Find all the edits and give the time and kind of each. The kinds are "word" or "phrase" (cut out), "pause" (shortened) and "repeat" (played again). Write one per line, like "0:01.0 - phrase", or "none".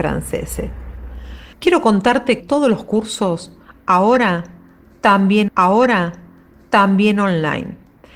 0:01.5 - pause
0:02.4 - word
0:05.5 - repeat